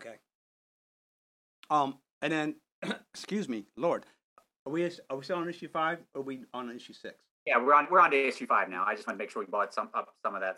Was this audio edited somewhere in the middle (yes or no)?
no